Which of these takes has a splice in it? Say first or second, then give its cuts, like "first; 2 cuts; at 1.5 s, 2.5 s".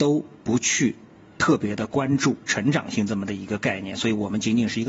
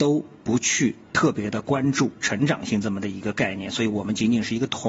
second; 1 cut; at 1.0 s